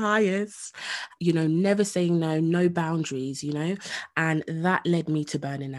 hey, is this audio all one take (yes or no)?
no